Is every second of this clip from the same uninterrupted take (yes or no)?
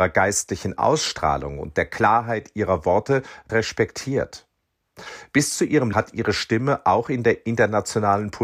no